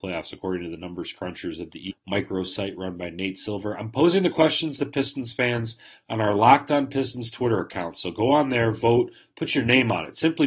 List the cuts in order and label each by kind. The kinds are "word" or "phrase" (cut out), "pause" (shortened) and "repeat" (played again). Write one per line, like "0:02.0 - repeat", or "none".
0:01.9 - word